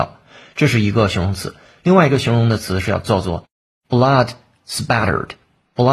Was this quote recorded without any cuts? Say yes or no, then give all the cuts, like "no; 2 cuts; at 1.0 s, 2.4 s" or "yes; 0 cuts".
yes; 0 cuts